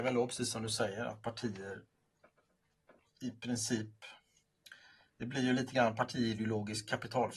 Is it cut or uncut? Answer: uncut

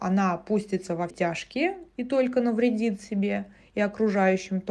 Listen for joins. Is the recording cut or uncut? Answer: cut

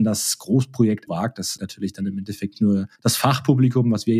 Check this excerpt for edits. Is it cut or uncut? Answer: cut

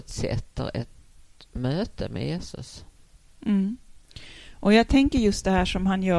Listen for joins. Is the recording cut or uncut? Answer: uncut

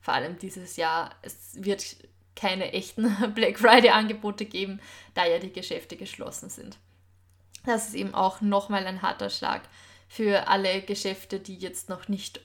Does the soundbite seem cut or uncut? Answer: uncut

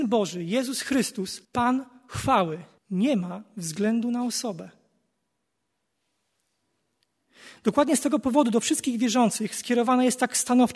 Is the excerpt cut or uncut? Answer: cut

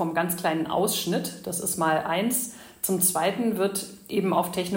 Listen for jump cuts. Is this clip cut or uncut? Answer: uncut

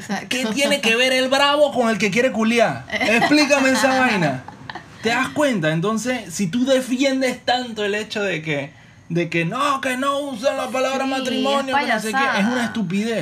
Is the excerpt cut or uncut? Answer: uncut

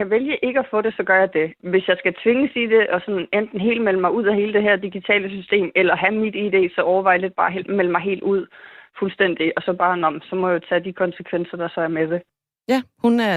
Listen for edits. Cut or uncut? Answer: uncut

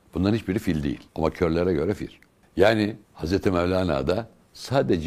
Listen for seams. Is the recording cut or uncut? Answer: cut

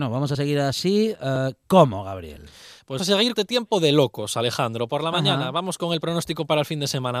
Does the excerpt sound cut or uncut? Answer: cut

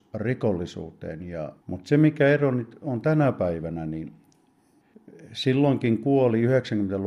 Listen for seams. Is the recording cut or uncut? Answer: cut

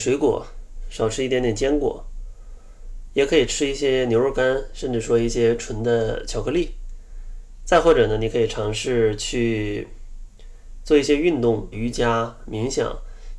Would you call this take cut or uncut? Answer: cut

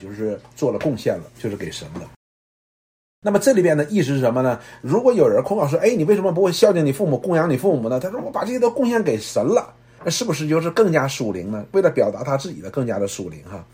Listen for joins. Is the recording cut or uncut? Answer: uncut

